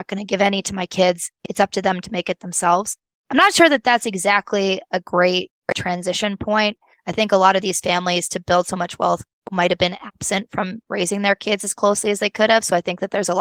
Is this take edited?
no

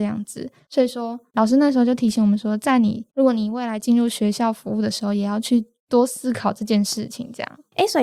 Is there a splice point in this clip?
yes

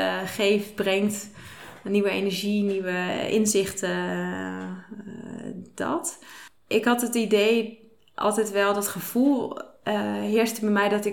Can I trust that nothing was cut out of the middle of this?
yes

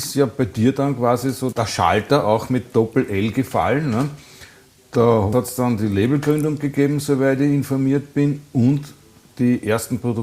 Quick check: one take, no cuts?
yes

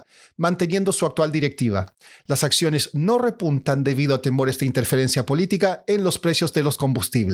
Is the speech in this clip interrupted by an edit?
no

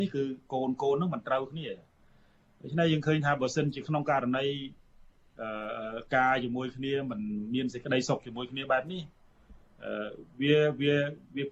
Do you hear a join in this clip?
no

